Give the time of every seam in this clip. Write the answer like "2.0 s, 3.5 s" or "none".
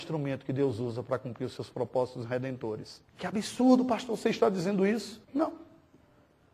3.1 s, 5.2 s

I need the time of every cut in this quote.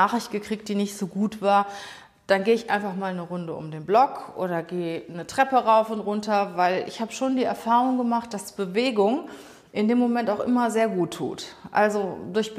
none

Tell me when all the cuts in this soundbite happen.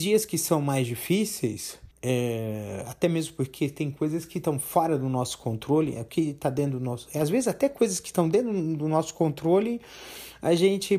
1.9 s

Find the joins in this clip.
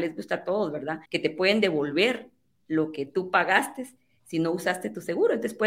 1.0 s

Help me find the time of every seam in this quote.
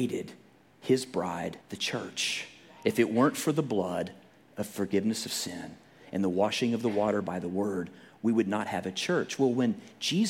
1.6 s

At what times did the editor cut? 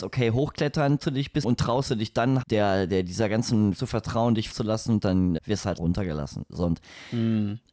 1.0 s, 1.4 s, 2.4 s, 3.7 s, 4.5 s, 5.4 s, 5.8 s

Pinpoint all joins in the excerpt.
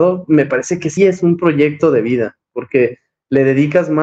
1.0 s

